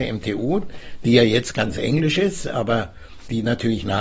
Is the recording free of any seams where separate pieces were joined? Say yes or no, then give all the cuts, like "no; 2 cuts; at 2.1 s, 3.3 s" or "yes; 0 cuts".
yes; 0 cuts